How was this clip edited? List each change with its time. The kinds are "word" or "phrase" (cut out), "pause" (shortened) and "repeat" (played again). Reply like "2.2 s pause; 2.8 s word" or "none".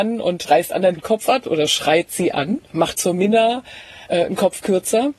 1.0 s word; 2.9 s word